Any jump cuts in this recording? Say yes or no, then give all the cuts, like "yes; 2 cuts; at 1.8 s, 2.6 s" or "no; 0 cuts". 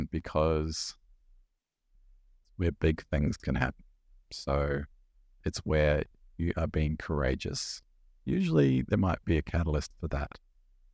no; 0 cuts